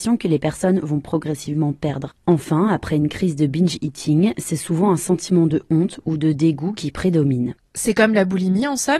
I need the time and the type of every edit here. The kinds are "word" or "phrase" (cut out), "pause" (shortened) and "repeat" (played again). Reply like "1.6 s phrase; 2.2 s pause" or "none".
none